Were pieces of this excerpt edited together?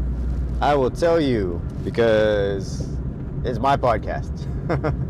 no; 0 cuts

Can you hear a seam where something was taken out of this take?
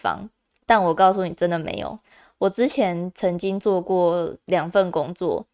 no; 0 cuts

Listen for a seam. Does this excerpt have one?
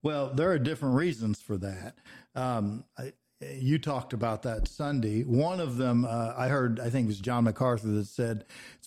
no; 0 cuts

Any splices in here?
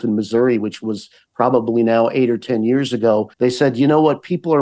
yes; 1 cut; at 3.3 s

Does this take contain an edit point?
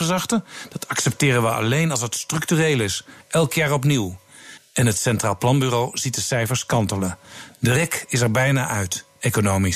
no; 0 cuts

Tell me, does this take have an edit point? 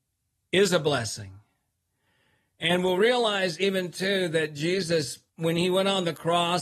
yes; 1 cut; at 5.3 s

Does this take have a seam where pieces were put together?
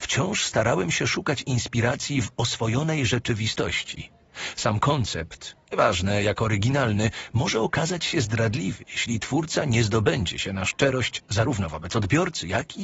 no; 0 cuts

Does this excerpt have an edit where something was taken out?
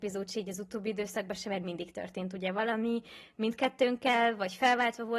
no; 0 cuts

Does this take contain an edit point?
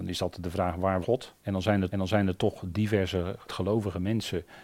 yes; 4 cuts; at 1.0 s, 1.4 s, 1.9 s, 3.5 s

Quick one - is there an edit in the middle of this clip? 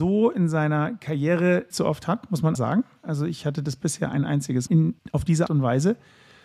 yes; 5 cuts; at 1.7 s, 2.6 s, 4.7 s, 5.0 s, 5.5 s

